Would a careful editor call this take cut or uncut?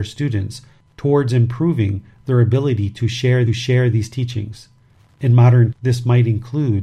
cut